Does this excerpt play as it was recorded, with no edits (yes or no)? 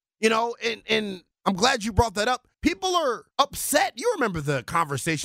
no